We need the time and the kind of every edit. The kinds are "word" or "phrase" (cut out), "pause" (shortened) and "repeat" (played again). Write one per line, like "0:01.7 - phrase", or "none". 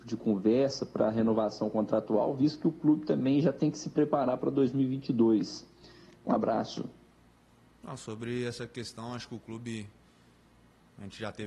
none

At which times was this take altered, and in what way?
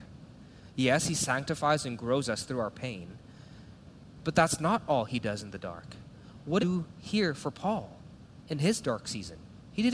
0:06.6 - phrase

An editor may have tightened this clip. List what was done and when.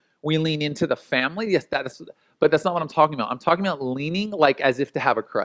none

